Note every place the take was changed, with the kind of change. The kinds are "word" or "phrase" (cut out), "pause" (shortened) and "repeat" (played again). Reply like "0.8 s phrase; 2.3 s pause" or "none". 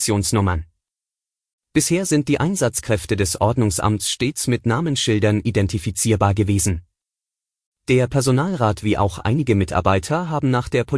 none